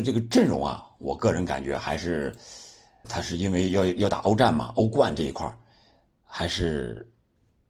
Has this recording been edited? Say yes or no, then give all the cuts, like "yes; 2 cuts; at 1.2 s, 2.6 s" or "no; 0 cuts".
yes; 1 cut; at 3.0 s